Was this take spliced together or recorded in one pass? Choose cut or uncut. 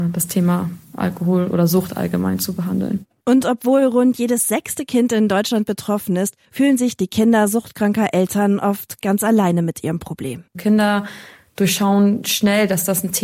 cut